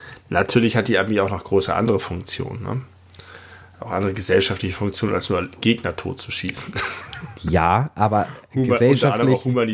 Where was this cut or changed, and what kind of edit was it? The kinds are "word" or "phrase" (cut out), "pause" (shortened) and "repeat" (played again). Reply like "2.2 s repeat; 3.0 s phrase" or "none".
none